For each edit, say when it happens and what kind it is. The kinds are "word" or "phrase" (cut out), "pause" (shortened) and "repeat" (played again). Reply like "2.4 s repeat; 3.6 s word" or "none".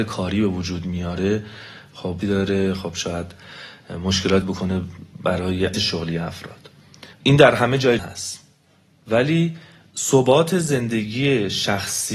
2.2 s word; 4.4 s word; 5.7 s word; 7.1 s pause; 8.0 s word; 9.9 s word